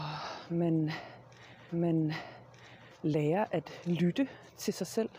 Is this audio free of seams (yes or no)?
no